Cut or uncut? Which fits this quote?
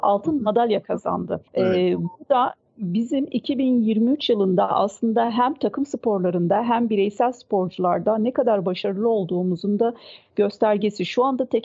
cut